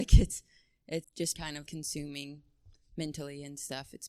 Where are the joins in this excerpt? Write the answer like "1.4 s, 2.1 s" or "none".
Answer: 1.0 s, 1.3 s, 1.6 s